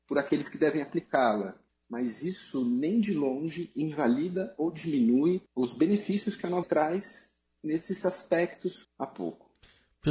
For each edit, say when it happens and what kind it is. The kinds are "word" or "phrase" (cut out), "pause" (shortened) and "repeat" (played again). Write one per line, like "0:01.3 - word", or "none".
0:05.5 - pause
0:06.6 - word
0:08.8 - phrase